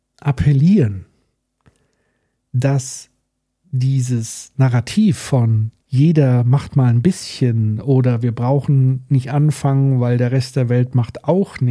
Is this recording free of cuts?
yes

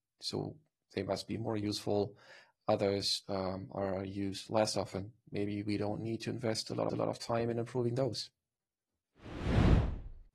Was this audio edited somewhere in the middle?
yes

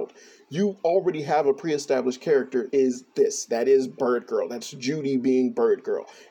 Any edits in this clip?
yes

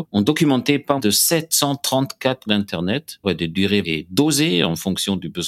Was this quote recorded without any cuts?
no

